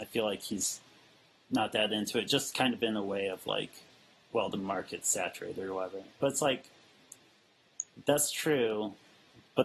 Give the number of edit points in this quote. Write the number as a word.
zero